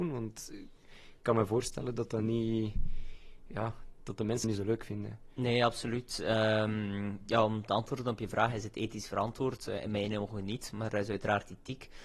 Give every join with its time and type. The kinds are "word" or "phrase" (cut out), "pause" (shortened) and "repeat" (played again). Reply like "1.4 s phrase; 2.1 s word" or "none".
4.4 s word